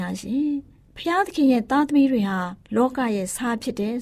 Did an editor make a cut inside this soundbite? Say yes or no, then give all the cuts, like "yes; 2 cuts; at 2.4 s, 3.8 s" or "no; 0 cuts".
yes; 1 cut; at 2.6 s